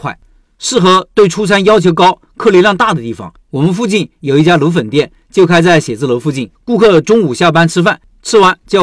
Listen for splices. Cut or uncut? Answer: cut